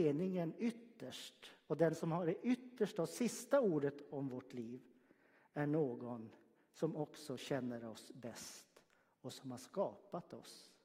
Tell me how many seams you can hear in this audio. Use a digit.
0